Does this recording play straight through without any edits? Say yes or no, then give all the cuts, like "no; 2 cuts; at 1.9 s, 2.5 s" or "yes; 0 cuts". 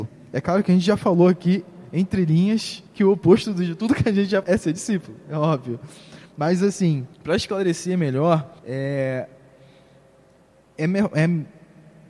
no; 5 cuts; at 2.9 s, 4.4 s, 6.3 s, 7.1 s, 8.6 s